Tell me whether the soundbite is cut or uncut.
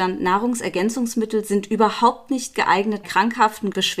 cut